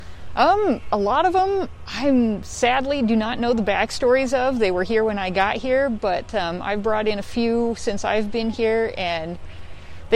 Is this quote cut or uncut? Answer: uncut